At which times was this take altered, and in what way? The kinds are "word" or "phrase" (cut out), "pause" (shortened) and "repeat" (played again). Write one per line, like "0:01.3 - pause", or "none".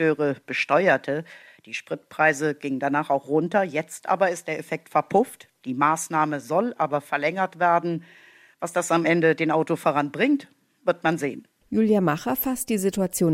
none